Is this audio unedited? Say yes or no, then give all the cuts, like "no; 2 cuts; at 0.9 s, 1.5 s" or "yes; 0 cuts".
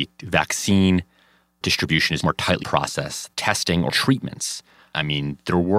no; 5 cuts; at 1.6 s, 2.2 s, 2.6 s, 3.3 s, 3.9 s